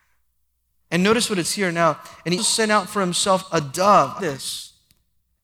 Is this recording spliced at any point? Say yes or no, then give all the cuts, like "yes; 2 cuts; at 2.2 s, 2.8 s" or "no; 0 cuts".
yes; 3 cuts; at 1.4 s, 2.4 s, 4.2 s